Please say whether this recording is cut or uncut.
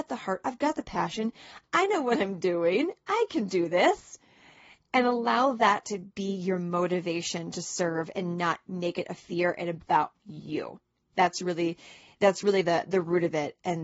uncut